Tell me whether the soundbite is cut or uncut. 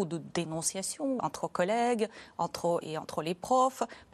cut